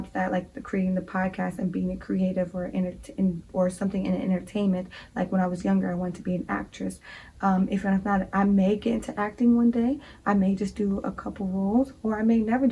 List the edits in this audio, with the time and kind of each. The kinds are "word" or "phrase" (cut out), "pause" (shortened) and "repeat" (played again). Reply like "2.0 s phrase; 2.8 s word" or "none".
none